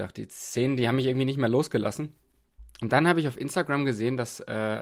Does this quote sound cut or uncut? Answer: uncut